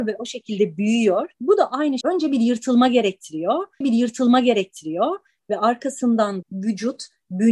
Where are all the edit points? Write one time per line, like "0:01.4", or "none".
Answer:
0:01.3
0:02.0
0:03.8
0:06.4